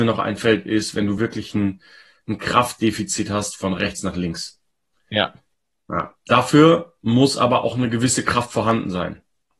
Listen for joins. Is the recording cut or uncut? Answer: uncut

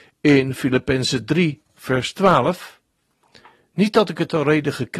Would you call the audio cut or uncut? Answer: uncut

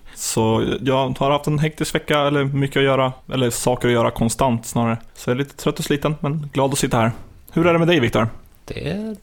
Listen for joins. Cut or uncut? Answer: uncut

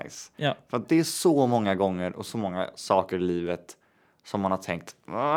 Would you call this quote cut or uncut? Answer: uncut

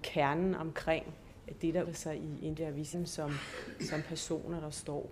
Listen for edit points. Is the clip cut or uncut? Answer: cut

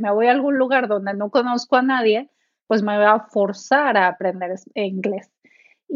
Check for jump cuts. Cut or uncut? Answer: uncut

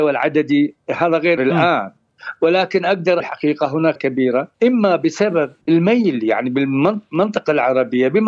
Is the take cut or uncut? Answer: cut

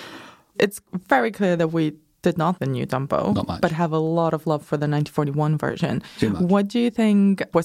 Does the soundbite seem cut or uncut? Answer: cut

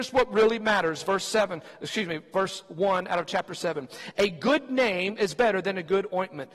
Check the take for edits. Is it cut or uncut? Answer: uncut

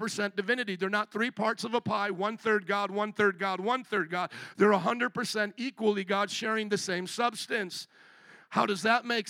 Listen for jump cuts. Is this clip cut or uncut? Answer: uncut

